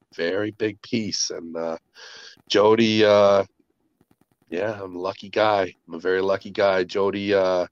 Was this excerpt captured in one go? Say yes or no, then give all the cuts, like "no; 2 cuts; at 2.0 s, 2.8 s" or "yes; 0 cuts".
no; 1 cut; at 5.8 s